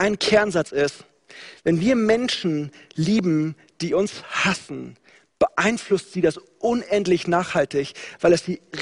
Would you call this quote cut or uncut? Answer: uncut